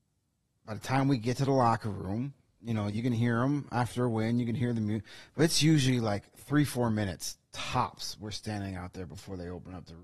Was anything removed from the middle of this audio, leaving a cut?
no; 0 cuts

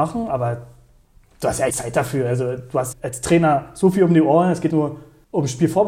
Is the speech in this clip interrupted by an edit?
yes; 3 cuts; at 1.7 s, 2.9 s, 4.7 s

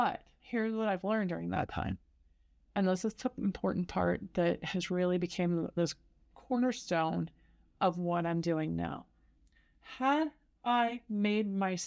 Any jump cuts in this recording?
no; 0 cuts

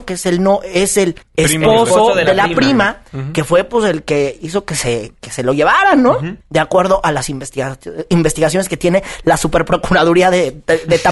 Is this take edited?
yes; 2 cuts; at 1.2 s, 6.4 s

